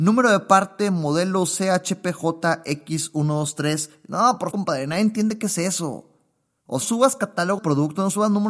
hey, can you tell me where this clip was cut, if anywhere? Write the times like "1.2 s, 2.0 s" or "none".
4.5 s, 6.8 s, 7.6 s